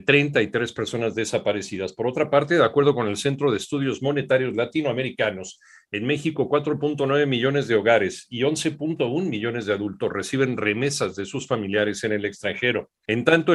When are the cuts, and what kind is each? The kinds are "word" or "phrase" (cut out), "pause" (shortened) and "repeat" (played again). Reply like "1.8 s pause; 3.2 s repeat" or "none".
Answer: none